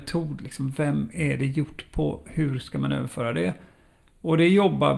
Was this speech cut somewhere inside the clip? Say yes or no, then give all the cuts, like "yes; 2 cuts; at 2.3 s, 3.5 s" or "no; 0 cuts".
no; 0 cuts